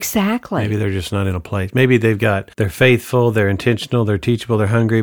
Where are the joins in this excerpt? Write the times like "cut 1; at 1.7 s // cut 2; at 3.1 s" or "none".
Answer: cut 1; at 2.5 s